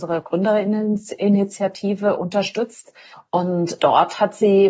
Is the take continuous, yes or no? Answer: no